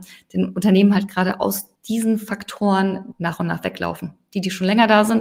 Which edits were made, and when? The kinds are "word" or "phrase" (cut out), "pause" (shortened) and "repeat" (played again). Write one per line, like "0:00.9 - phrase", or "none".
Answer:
0:01.8 - pause
0:03.1 - word